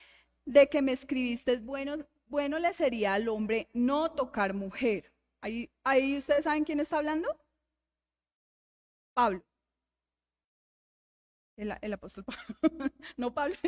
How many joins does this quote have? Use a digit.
0